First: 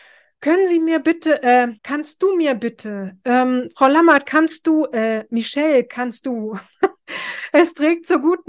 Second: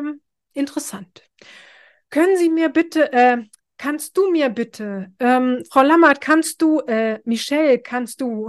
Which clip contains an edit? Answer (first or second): first